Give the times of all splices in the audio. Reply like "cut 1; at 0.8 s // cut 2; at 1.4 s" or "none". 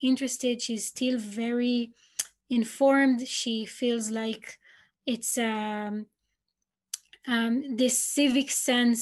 none

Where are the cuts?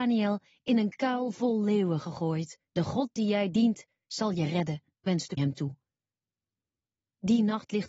cut 1; at 2.7 s // cut 2; at 4.9 s // cut 3; at 5.4 s

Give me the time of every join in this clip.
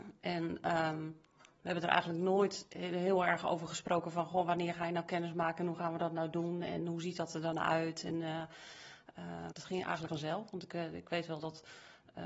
cut 1; at 9.5 s // cut 2; at 10.1 s

